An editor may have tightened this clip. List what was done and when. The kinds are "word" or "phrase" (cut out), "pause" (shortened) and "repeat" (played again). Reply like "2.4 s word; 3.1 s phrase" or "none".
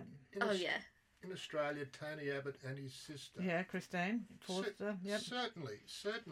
none